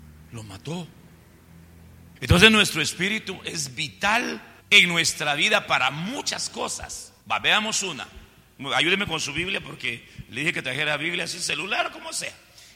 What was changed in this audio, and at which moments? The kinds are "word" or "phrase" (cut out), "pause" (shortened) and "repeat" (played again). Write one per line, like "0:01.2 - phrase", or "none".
0:02.2 - pause
0:04.6 - pause
0:07.2 - pause